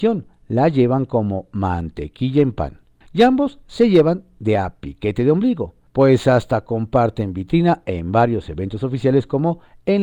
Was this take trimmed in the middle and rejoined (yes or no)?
yes